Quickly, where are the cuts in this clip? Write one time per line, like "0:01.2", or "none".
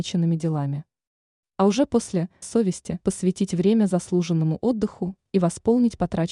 0:02.4
0:03.0